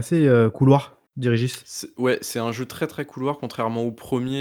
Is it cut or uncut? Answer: cut